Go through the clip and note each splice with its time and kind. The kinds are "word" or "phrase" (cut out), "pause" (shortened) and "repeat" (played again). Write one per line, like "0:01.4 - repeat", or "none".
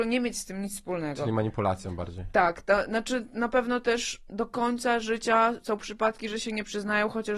none